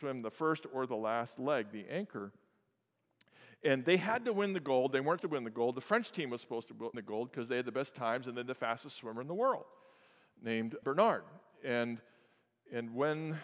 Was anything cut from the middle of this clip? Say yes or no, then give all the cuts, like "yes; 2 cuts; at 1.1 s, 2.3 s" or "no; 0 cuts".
yes; 3 cuts; at 5.2 s, 6.9 s, 10.8 s